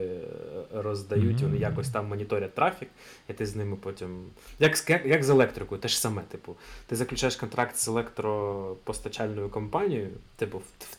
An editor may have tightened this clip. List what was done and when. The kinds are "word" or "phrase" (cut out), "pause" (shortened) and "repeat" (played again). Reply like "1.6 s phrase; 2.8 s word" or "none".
none